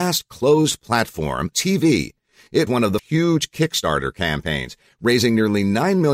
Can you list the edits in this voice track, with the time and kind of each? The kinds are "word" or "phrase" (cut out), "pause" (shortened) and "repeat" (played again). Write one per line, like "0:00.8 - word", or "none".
0:01.5 - word
0:02.7 - word
0:03.0 - word